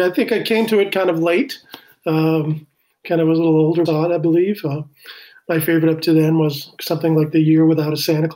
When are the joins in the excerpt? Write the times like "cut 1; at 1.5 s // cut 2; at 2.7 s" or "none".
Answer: cut 1; at 3.9 s